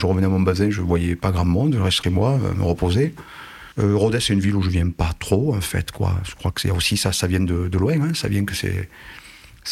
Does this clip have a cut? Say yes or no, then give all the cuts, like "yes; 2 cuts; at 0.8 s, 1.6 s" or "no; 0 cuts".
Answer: yes; 2 cuts; at 2.0 s, 3.7 s